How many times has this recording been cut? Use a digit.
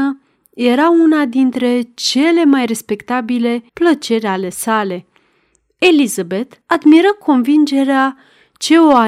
2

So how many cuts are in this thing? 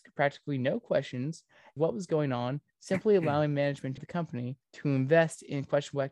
3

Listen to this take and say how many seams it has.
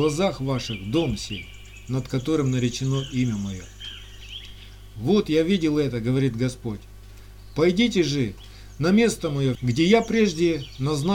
1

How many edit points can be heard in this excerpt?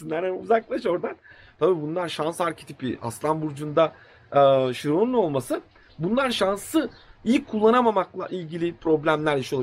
0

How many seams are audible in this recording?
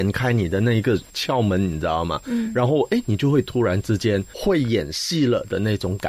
0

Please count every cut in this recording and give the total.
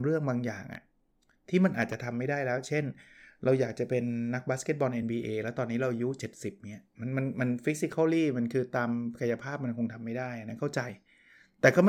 0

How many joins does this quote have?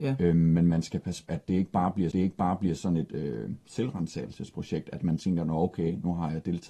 2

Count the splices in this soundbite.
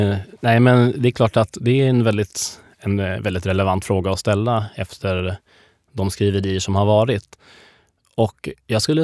0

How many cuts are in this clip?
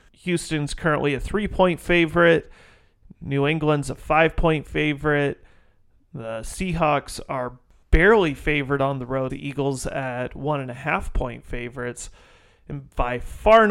1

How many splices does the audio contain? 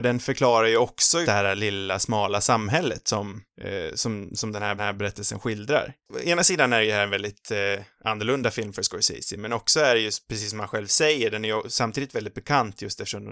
3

